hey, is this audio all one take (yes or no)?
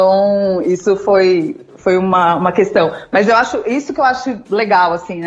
yes